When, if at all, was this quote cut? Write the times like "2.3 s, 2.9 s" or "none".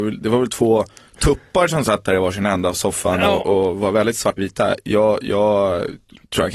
4.4 s